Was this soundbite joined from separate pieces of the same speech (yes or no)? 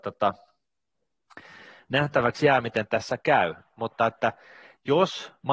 no